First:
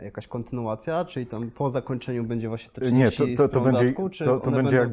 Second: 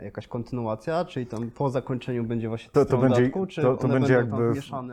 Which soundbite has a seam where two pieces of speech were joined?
second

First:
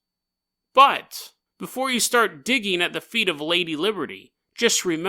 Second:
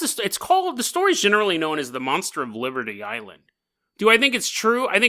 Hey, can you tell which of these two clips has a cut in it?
first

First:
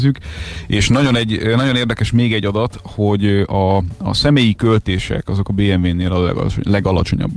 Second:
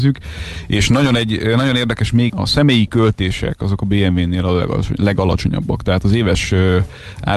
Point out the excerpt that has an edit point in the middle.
second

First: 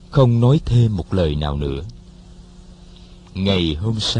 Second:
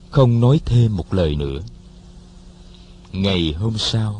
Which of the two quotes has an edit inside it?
second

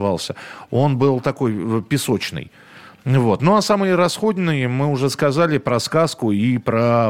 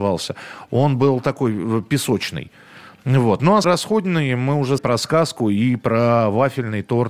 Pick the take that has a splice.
second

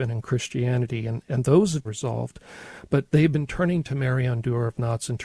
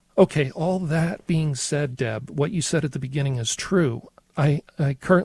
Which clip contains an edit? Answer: first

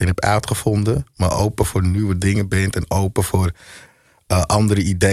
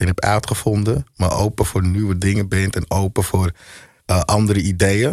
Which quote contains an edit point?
second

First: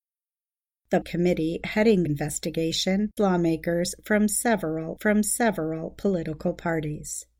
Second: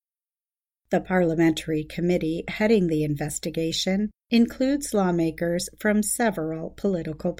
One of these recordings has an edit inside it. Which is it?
first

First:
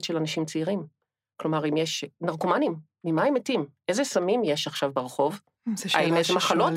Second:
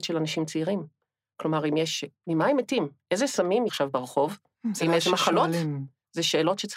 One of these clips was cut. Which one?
second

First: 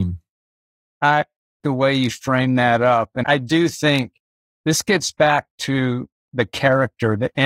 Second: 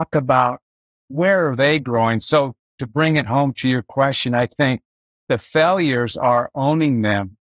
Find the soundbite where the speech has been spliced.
first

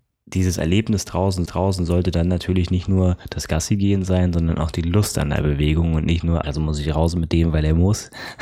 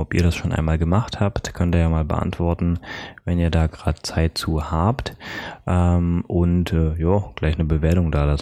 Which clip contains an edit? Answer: first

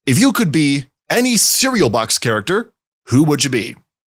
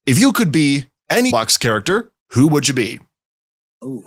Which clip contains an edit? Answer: second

